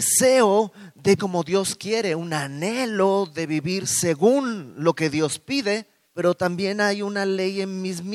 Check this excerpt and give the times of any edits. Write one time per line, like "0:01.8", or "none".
0:01.2
0:06.0